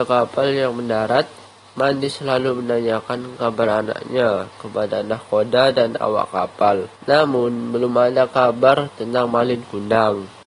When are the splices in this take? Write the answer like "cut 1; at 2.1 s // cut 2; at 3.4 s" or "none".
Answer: cut 1; at 7.0 s

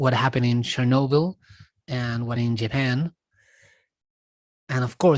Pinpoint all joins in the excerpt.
cut 1; at 2.4 s

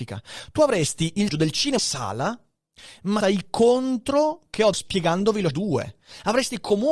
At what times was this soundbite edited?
cut 1; at 1.3 s // cut 2; at 1.8 s // cut 3; at 3.2 s // cut 4; at 4.7 s // cut 5; at 5.5 s

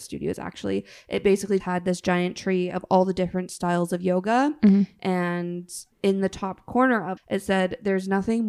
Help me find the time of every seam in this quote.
cut 1; at 1.6 s // cut 2; at 5.9 s // cut 3; at 7.2 s

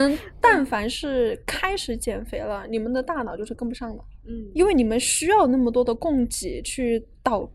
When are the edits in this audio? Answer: none

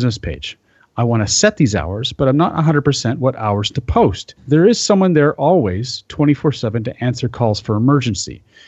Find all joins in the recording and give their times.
cut 1; at 4.4 s

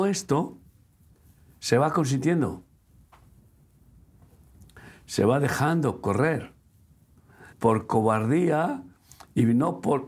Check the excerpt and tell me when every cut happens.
cut 1; at 7.5 s

